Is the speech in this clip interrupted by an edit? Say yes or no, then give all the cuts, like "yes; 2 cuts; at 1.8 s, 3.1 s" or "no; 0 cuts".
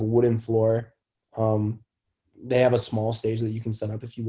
no; 0 cuts